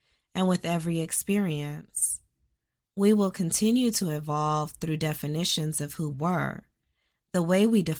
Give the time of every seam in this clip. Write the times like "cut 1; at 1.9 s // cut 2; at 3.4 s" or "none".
cut 1; at 6.1 s